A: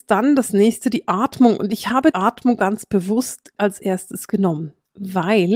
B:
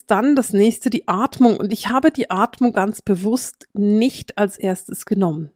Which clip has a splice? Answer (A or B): A